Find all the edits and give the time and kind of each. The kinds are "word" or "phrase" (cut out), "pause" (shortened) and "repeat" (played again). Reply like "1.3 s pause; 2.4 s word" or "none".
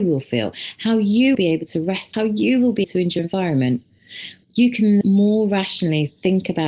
1.3 s word; 2.1 s word; 2.8 s word; 3.2 s word; 5.0 s word